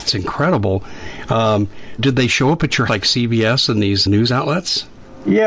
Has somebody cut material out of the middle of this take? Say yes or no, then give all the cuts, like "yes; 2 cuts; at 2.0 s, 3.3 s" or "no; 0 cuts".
yes; 3 cuts; at 2.0 s, 2.9 s, 4.1 s